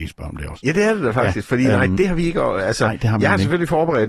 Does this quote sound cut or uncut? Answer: uncut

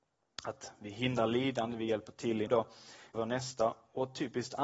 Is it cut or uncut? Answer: cut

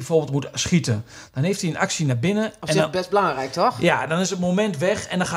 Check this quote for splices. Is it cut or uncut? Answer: uncut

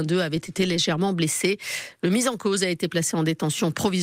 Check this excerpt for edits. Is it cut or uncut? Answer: uncut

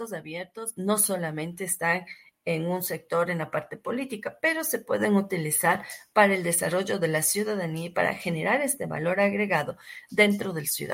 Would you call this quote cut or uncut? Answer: uncut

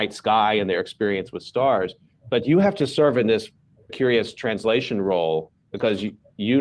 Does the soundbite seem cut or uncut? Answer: cut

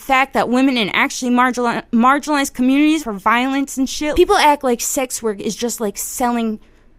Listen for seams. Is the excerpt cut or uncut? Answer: cut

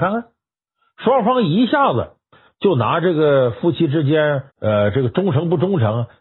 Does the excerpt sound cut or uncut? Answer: cut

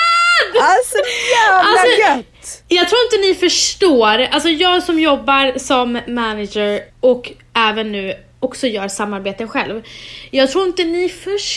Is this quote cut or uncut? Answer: cut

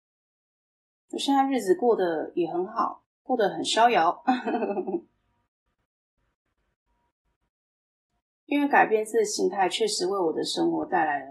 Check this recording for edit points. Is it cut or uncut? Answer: uncut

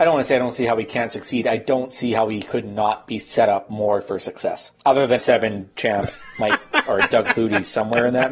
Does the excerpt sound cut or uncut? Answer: cut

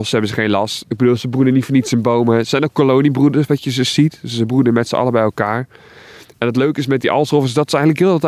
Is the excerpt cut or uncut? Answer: uncut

